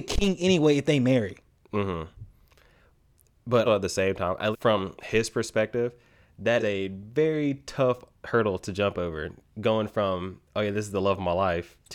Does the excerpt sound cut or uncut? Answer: cut